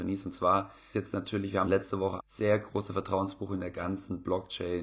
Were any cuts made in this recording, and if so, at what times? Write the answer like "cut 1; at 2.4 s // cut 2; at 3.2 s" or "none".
cut 1; at 0.9 s // cut 2; at 1.6 s // cut 3; at 2.2 s